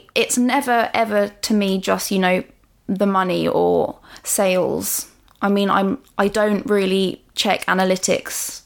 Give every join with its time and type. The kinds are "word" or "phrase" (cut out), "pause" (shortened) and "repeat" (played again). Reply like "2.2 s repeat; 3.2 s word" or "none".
none

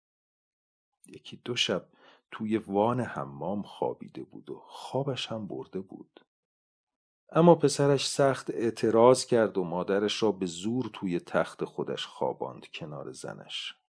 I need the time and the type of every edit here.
none

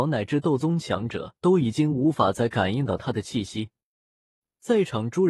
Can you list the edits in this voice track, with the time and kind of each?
1.4 s pause

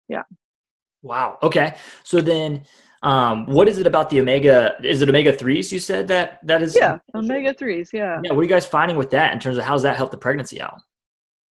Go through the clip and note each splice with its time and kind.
none

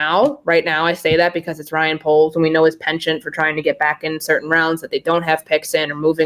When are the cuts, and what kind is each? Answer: none

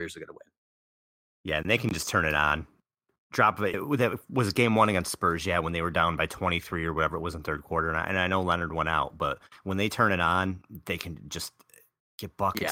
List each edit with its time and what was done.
3.7 s word

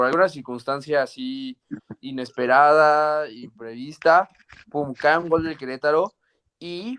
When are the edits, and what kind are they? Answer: none

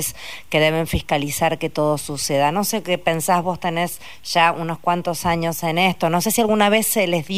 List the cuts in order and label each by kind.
3.4 s word

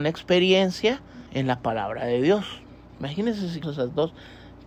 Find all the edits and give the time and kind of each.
1.3 s pause; 3.6 s word

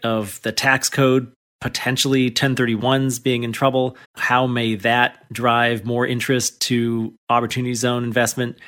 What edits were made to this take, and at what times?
4.0 s pause

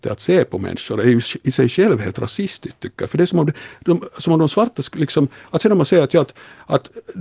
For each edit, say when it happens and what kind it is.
none

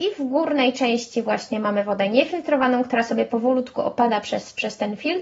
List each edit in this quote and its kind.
none

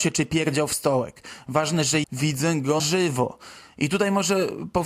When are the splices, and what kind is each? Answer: 2.0 s word; 2.8 s word

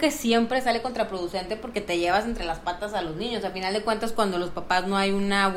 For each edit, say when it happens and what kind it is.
none

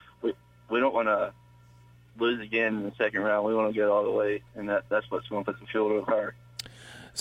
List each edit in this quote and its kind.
none

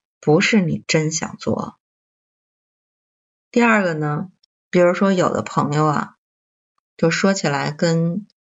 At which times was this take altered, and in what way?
4.5 s pause

